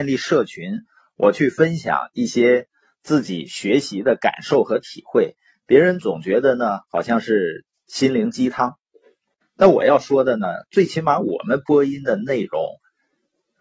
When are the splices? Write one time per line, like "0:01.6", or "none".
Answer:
none